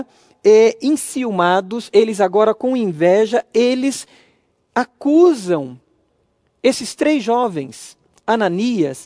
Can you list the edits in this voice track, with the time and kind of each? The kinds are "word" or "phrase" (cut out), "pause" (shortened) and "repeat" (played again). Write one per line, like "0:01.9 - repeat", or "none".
none